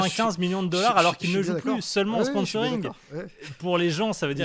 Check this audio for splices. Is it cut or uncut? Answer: uncut